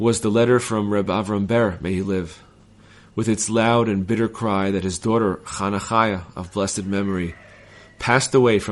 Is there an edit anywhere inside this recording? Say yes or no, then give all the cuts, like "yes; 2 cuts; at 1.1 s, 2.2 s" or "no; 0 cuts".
no; 0 cuts